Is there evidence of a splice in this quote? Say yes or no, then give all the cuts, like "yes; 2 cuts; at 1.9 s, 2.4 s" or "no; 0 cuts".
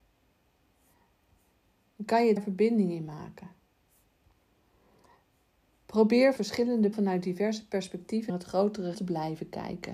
yes; 5 cuts; at 2.4 s, 6.4 s, 6.9 s, 8.3 s, 8.9 s